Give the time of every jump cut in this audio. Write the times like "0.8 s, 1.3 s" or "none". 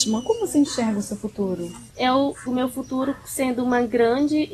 2.5 s